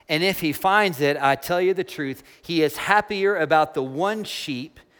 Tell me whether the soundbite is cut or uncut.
uncut